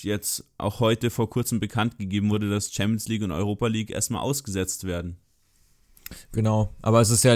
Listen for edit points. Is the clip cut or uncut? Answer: uncut